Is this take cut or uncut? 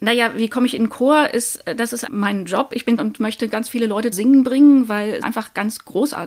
cut